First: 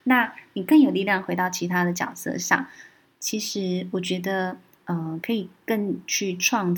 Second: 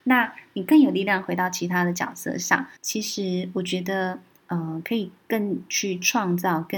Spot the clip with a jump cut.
second; 1 cut; at 2.8 s

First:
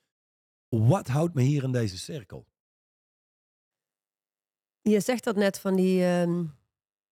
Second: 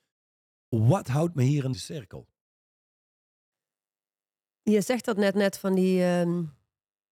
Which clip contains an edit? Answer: second; 2 cuts; at 1.7 s, 5.3 s

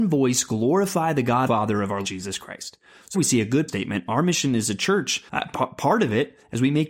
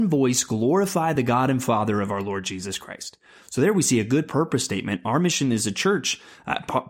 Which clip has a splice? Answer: first; 5 cuts; at 1.5 s, 2.0 s, 3.1 s, 3.7 s, 5.3 s

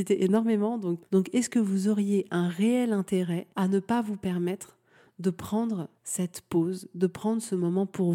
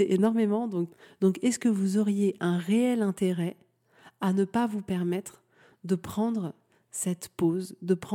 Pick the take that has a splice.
first; 3 cuts; at 1.0 s, 3.5 s, 6.0 s

